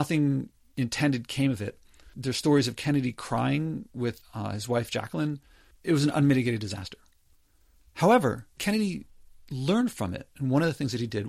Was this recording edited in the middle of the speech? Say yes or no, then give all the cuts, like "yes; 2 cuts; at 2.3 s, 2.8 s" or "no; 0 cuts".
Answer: no; 0 cuts